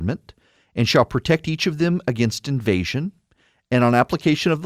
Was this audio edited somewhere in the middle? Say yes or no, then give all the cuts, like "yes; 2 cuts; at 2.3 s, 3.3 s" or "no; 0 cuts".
no; 0 cuts